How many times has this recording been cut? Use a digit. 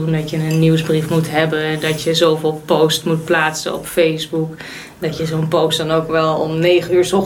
0